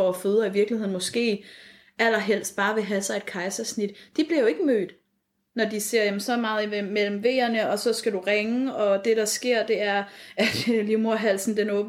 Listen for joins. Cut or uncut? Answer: uncut